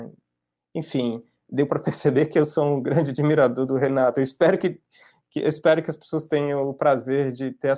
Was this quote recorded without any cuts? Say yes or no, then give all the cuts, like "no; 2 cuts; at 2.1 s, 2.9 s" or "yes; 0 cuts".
yes; 0 cuts